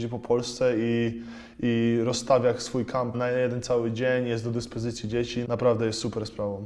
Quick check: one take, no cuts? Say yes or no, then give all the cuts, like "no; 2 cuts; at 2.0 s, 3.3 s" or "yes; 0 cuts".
no; 2 cuts; at 3.1 s, 5.4 s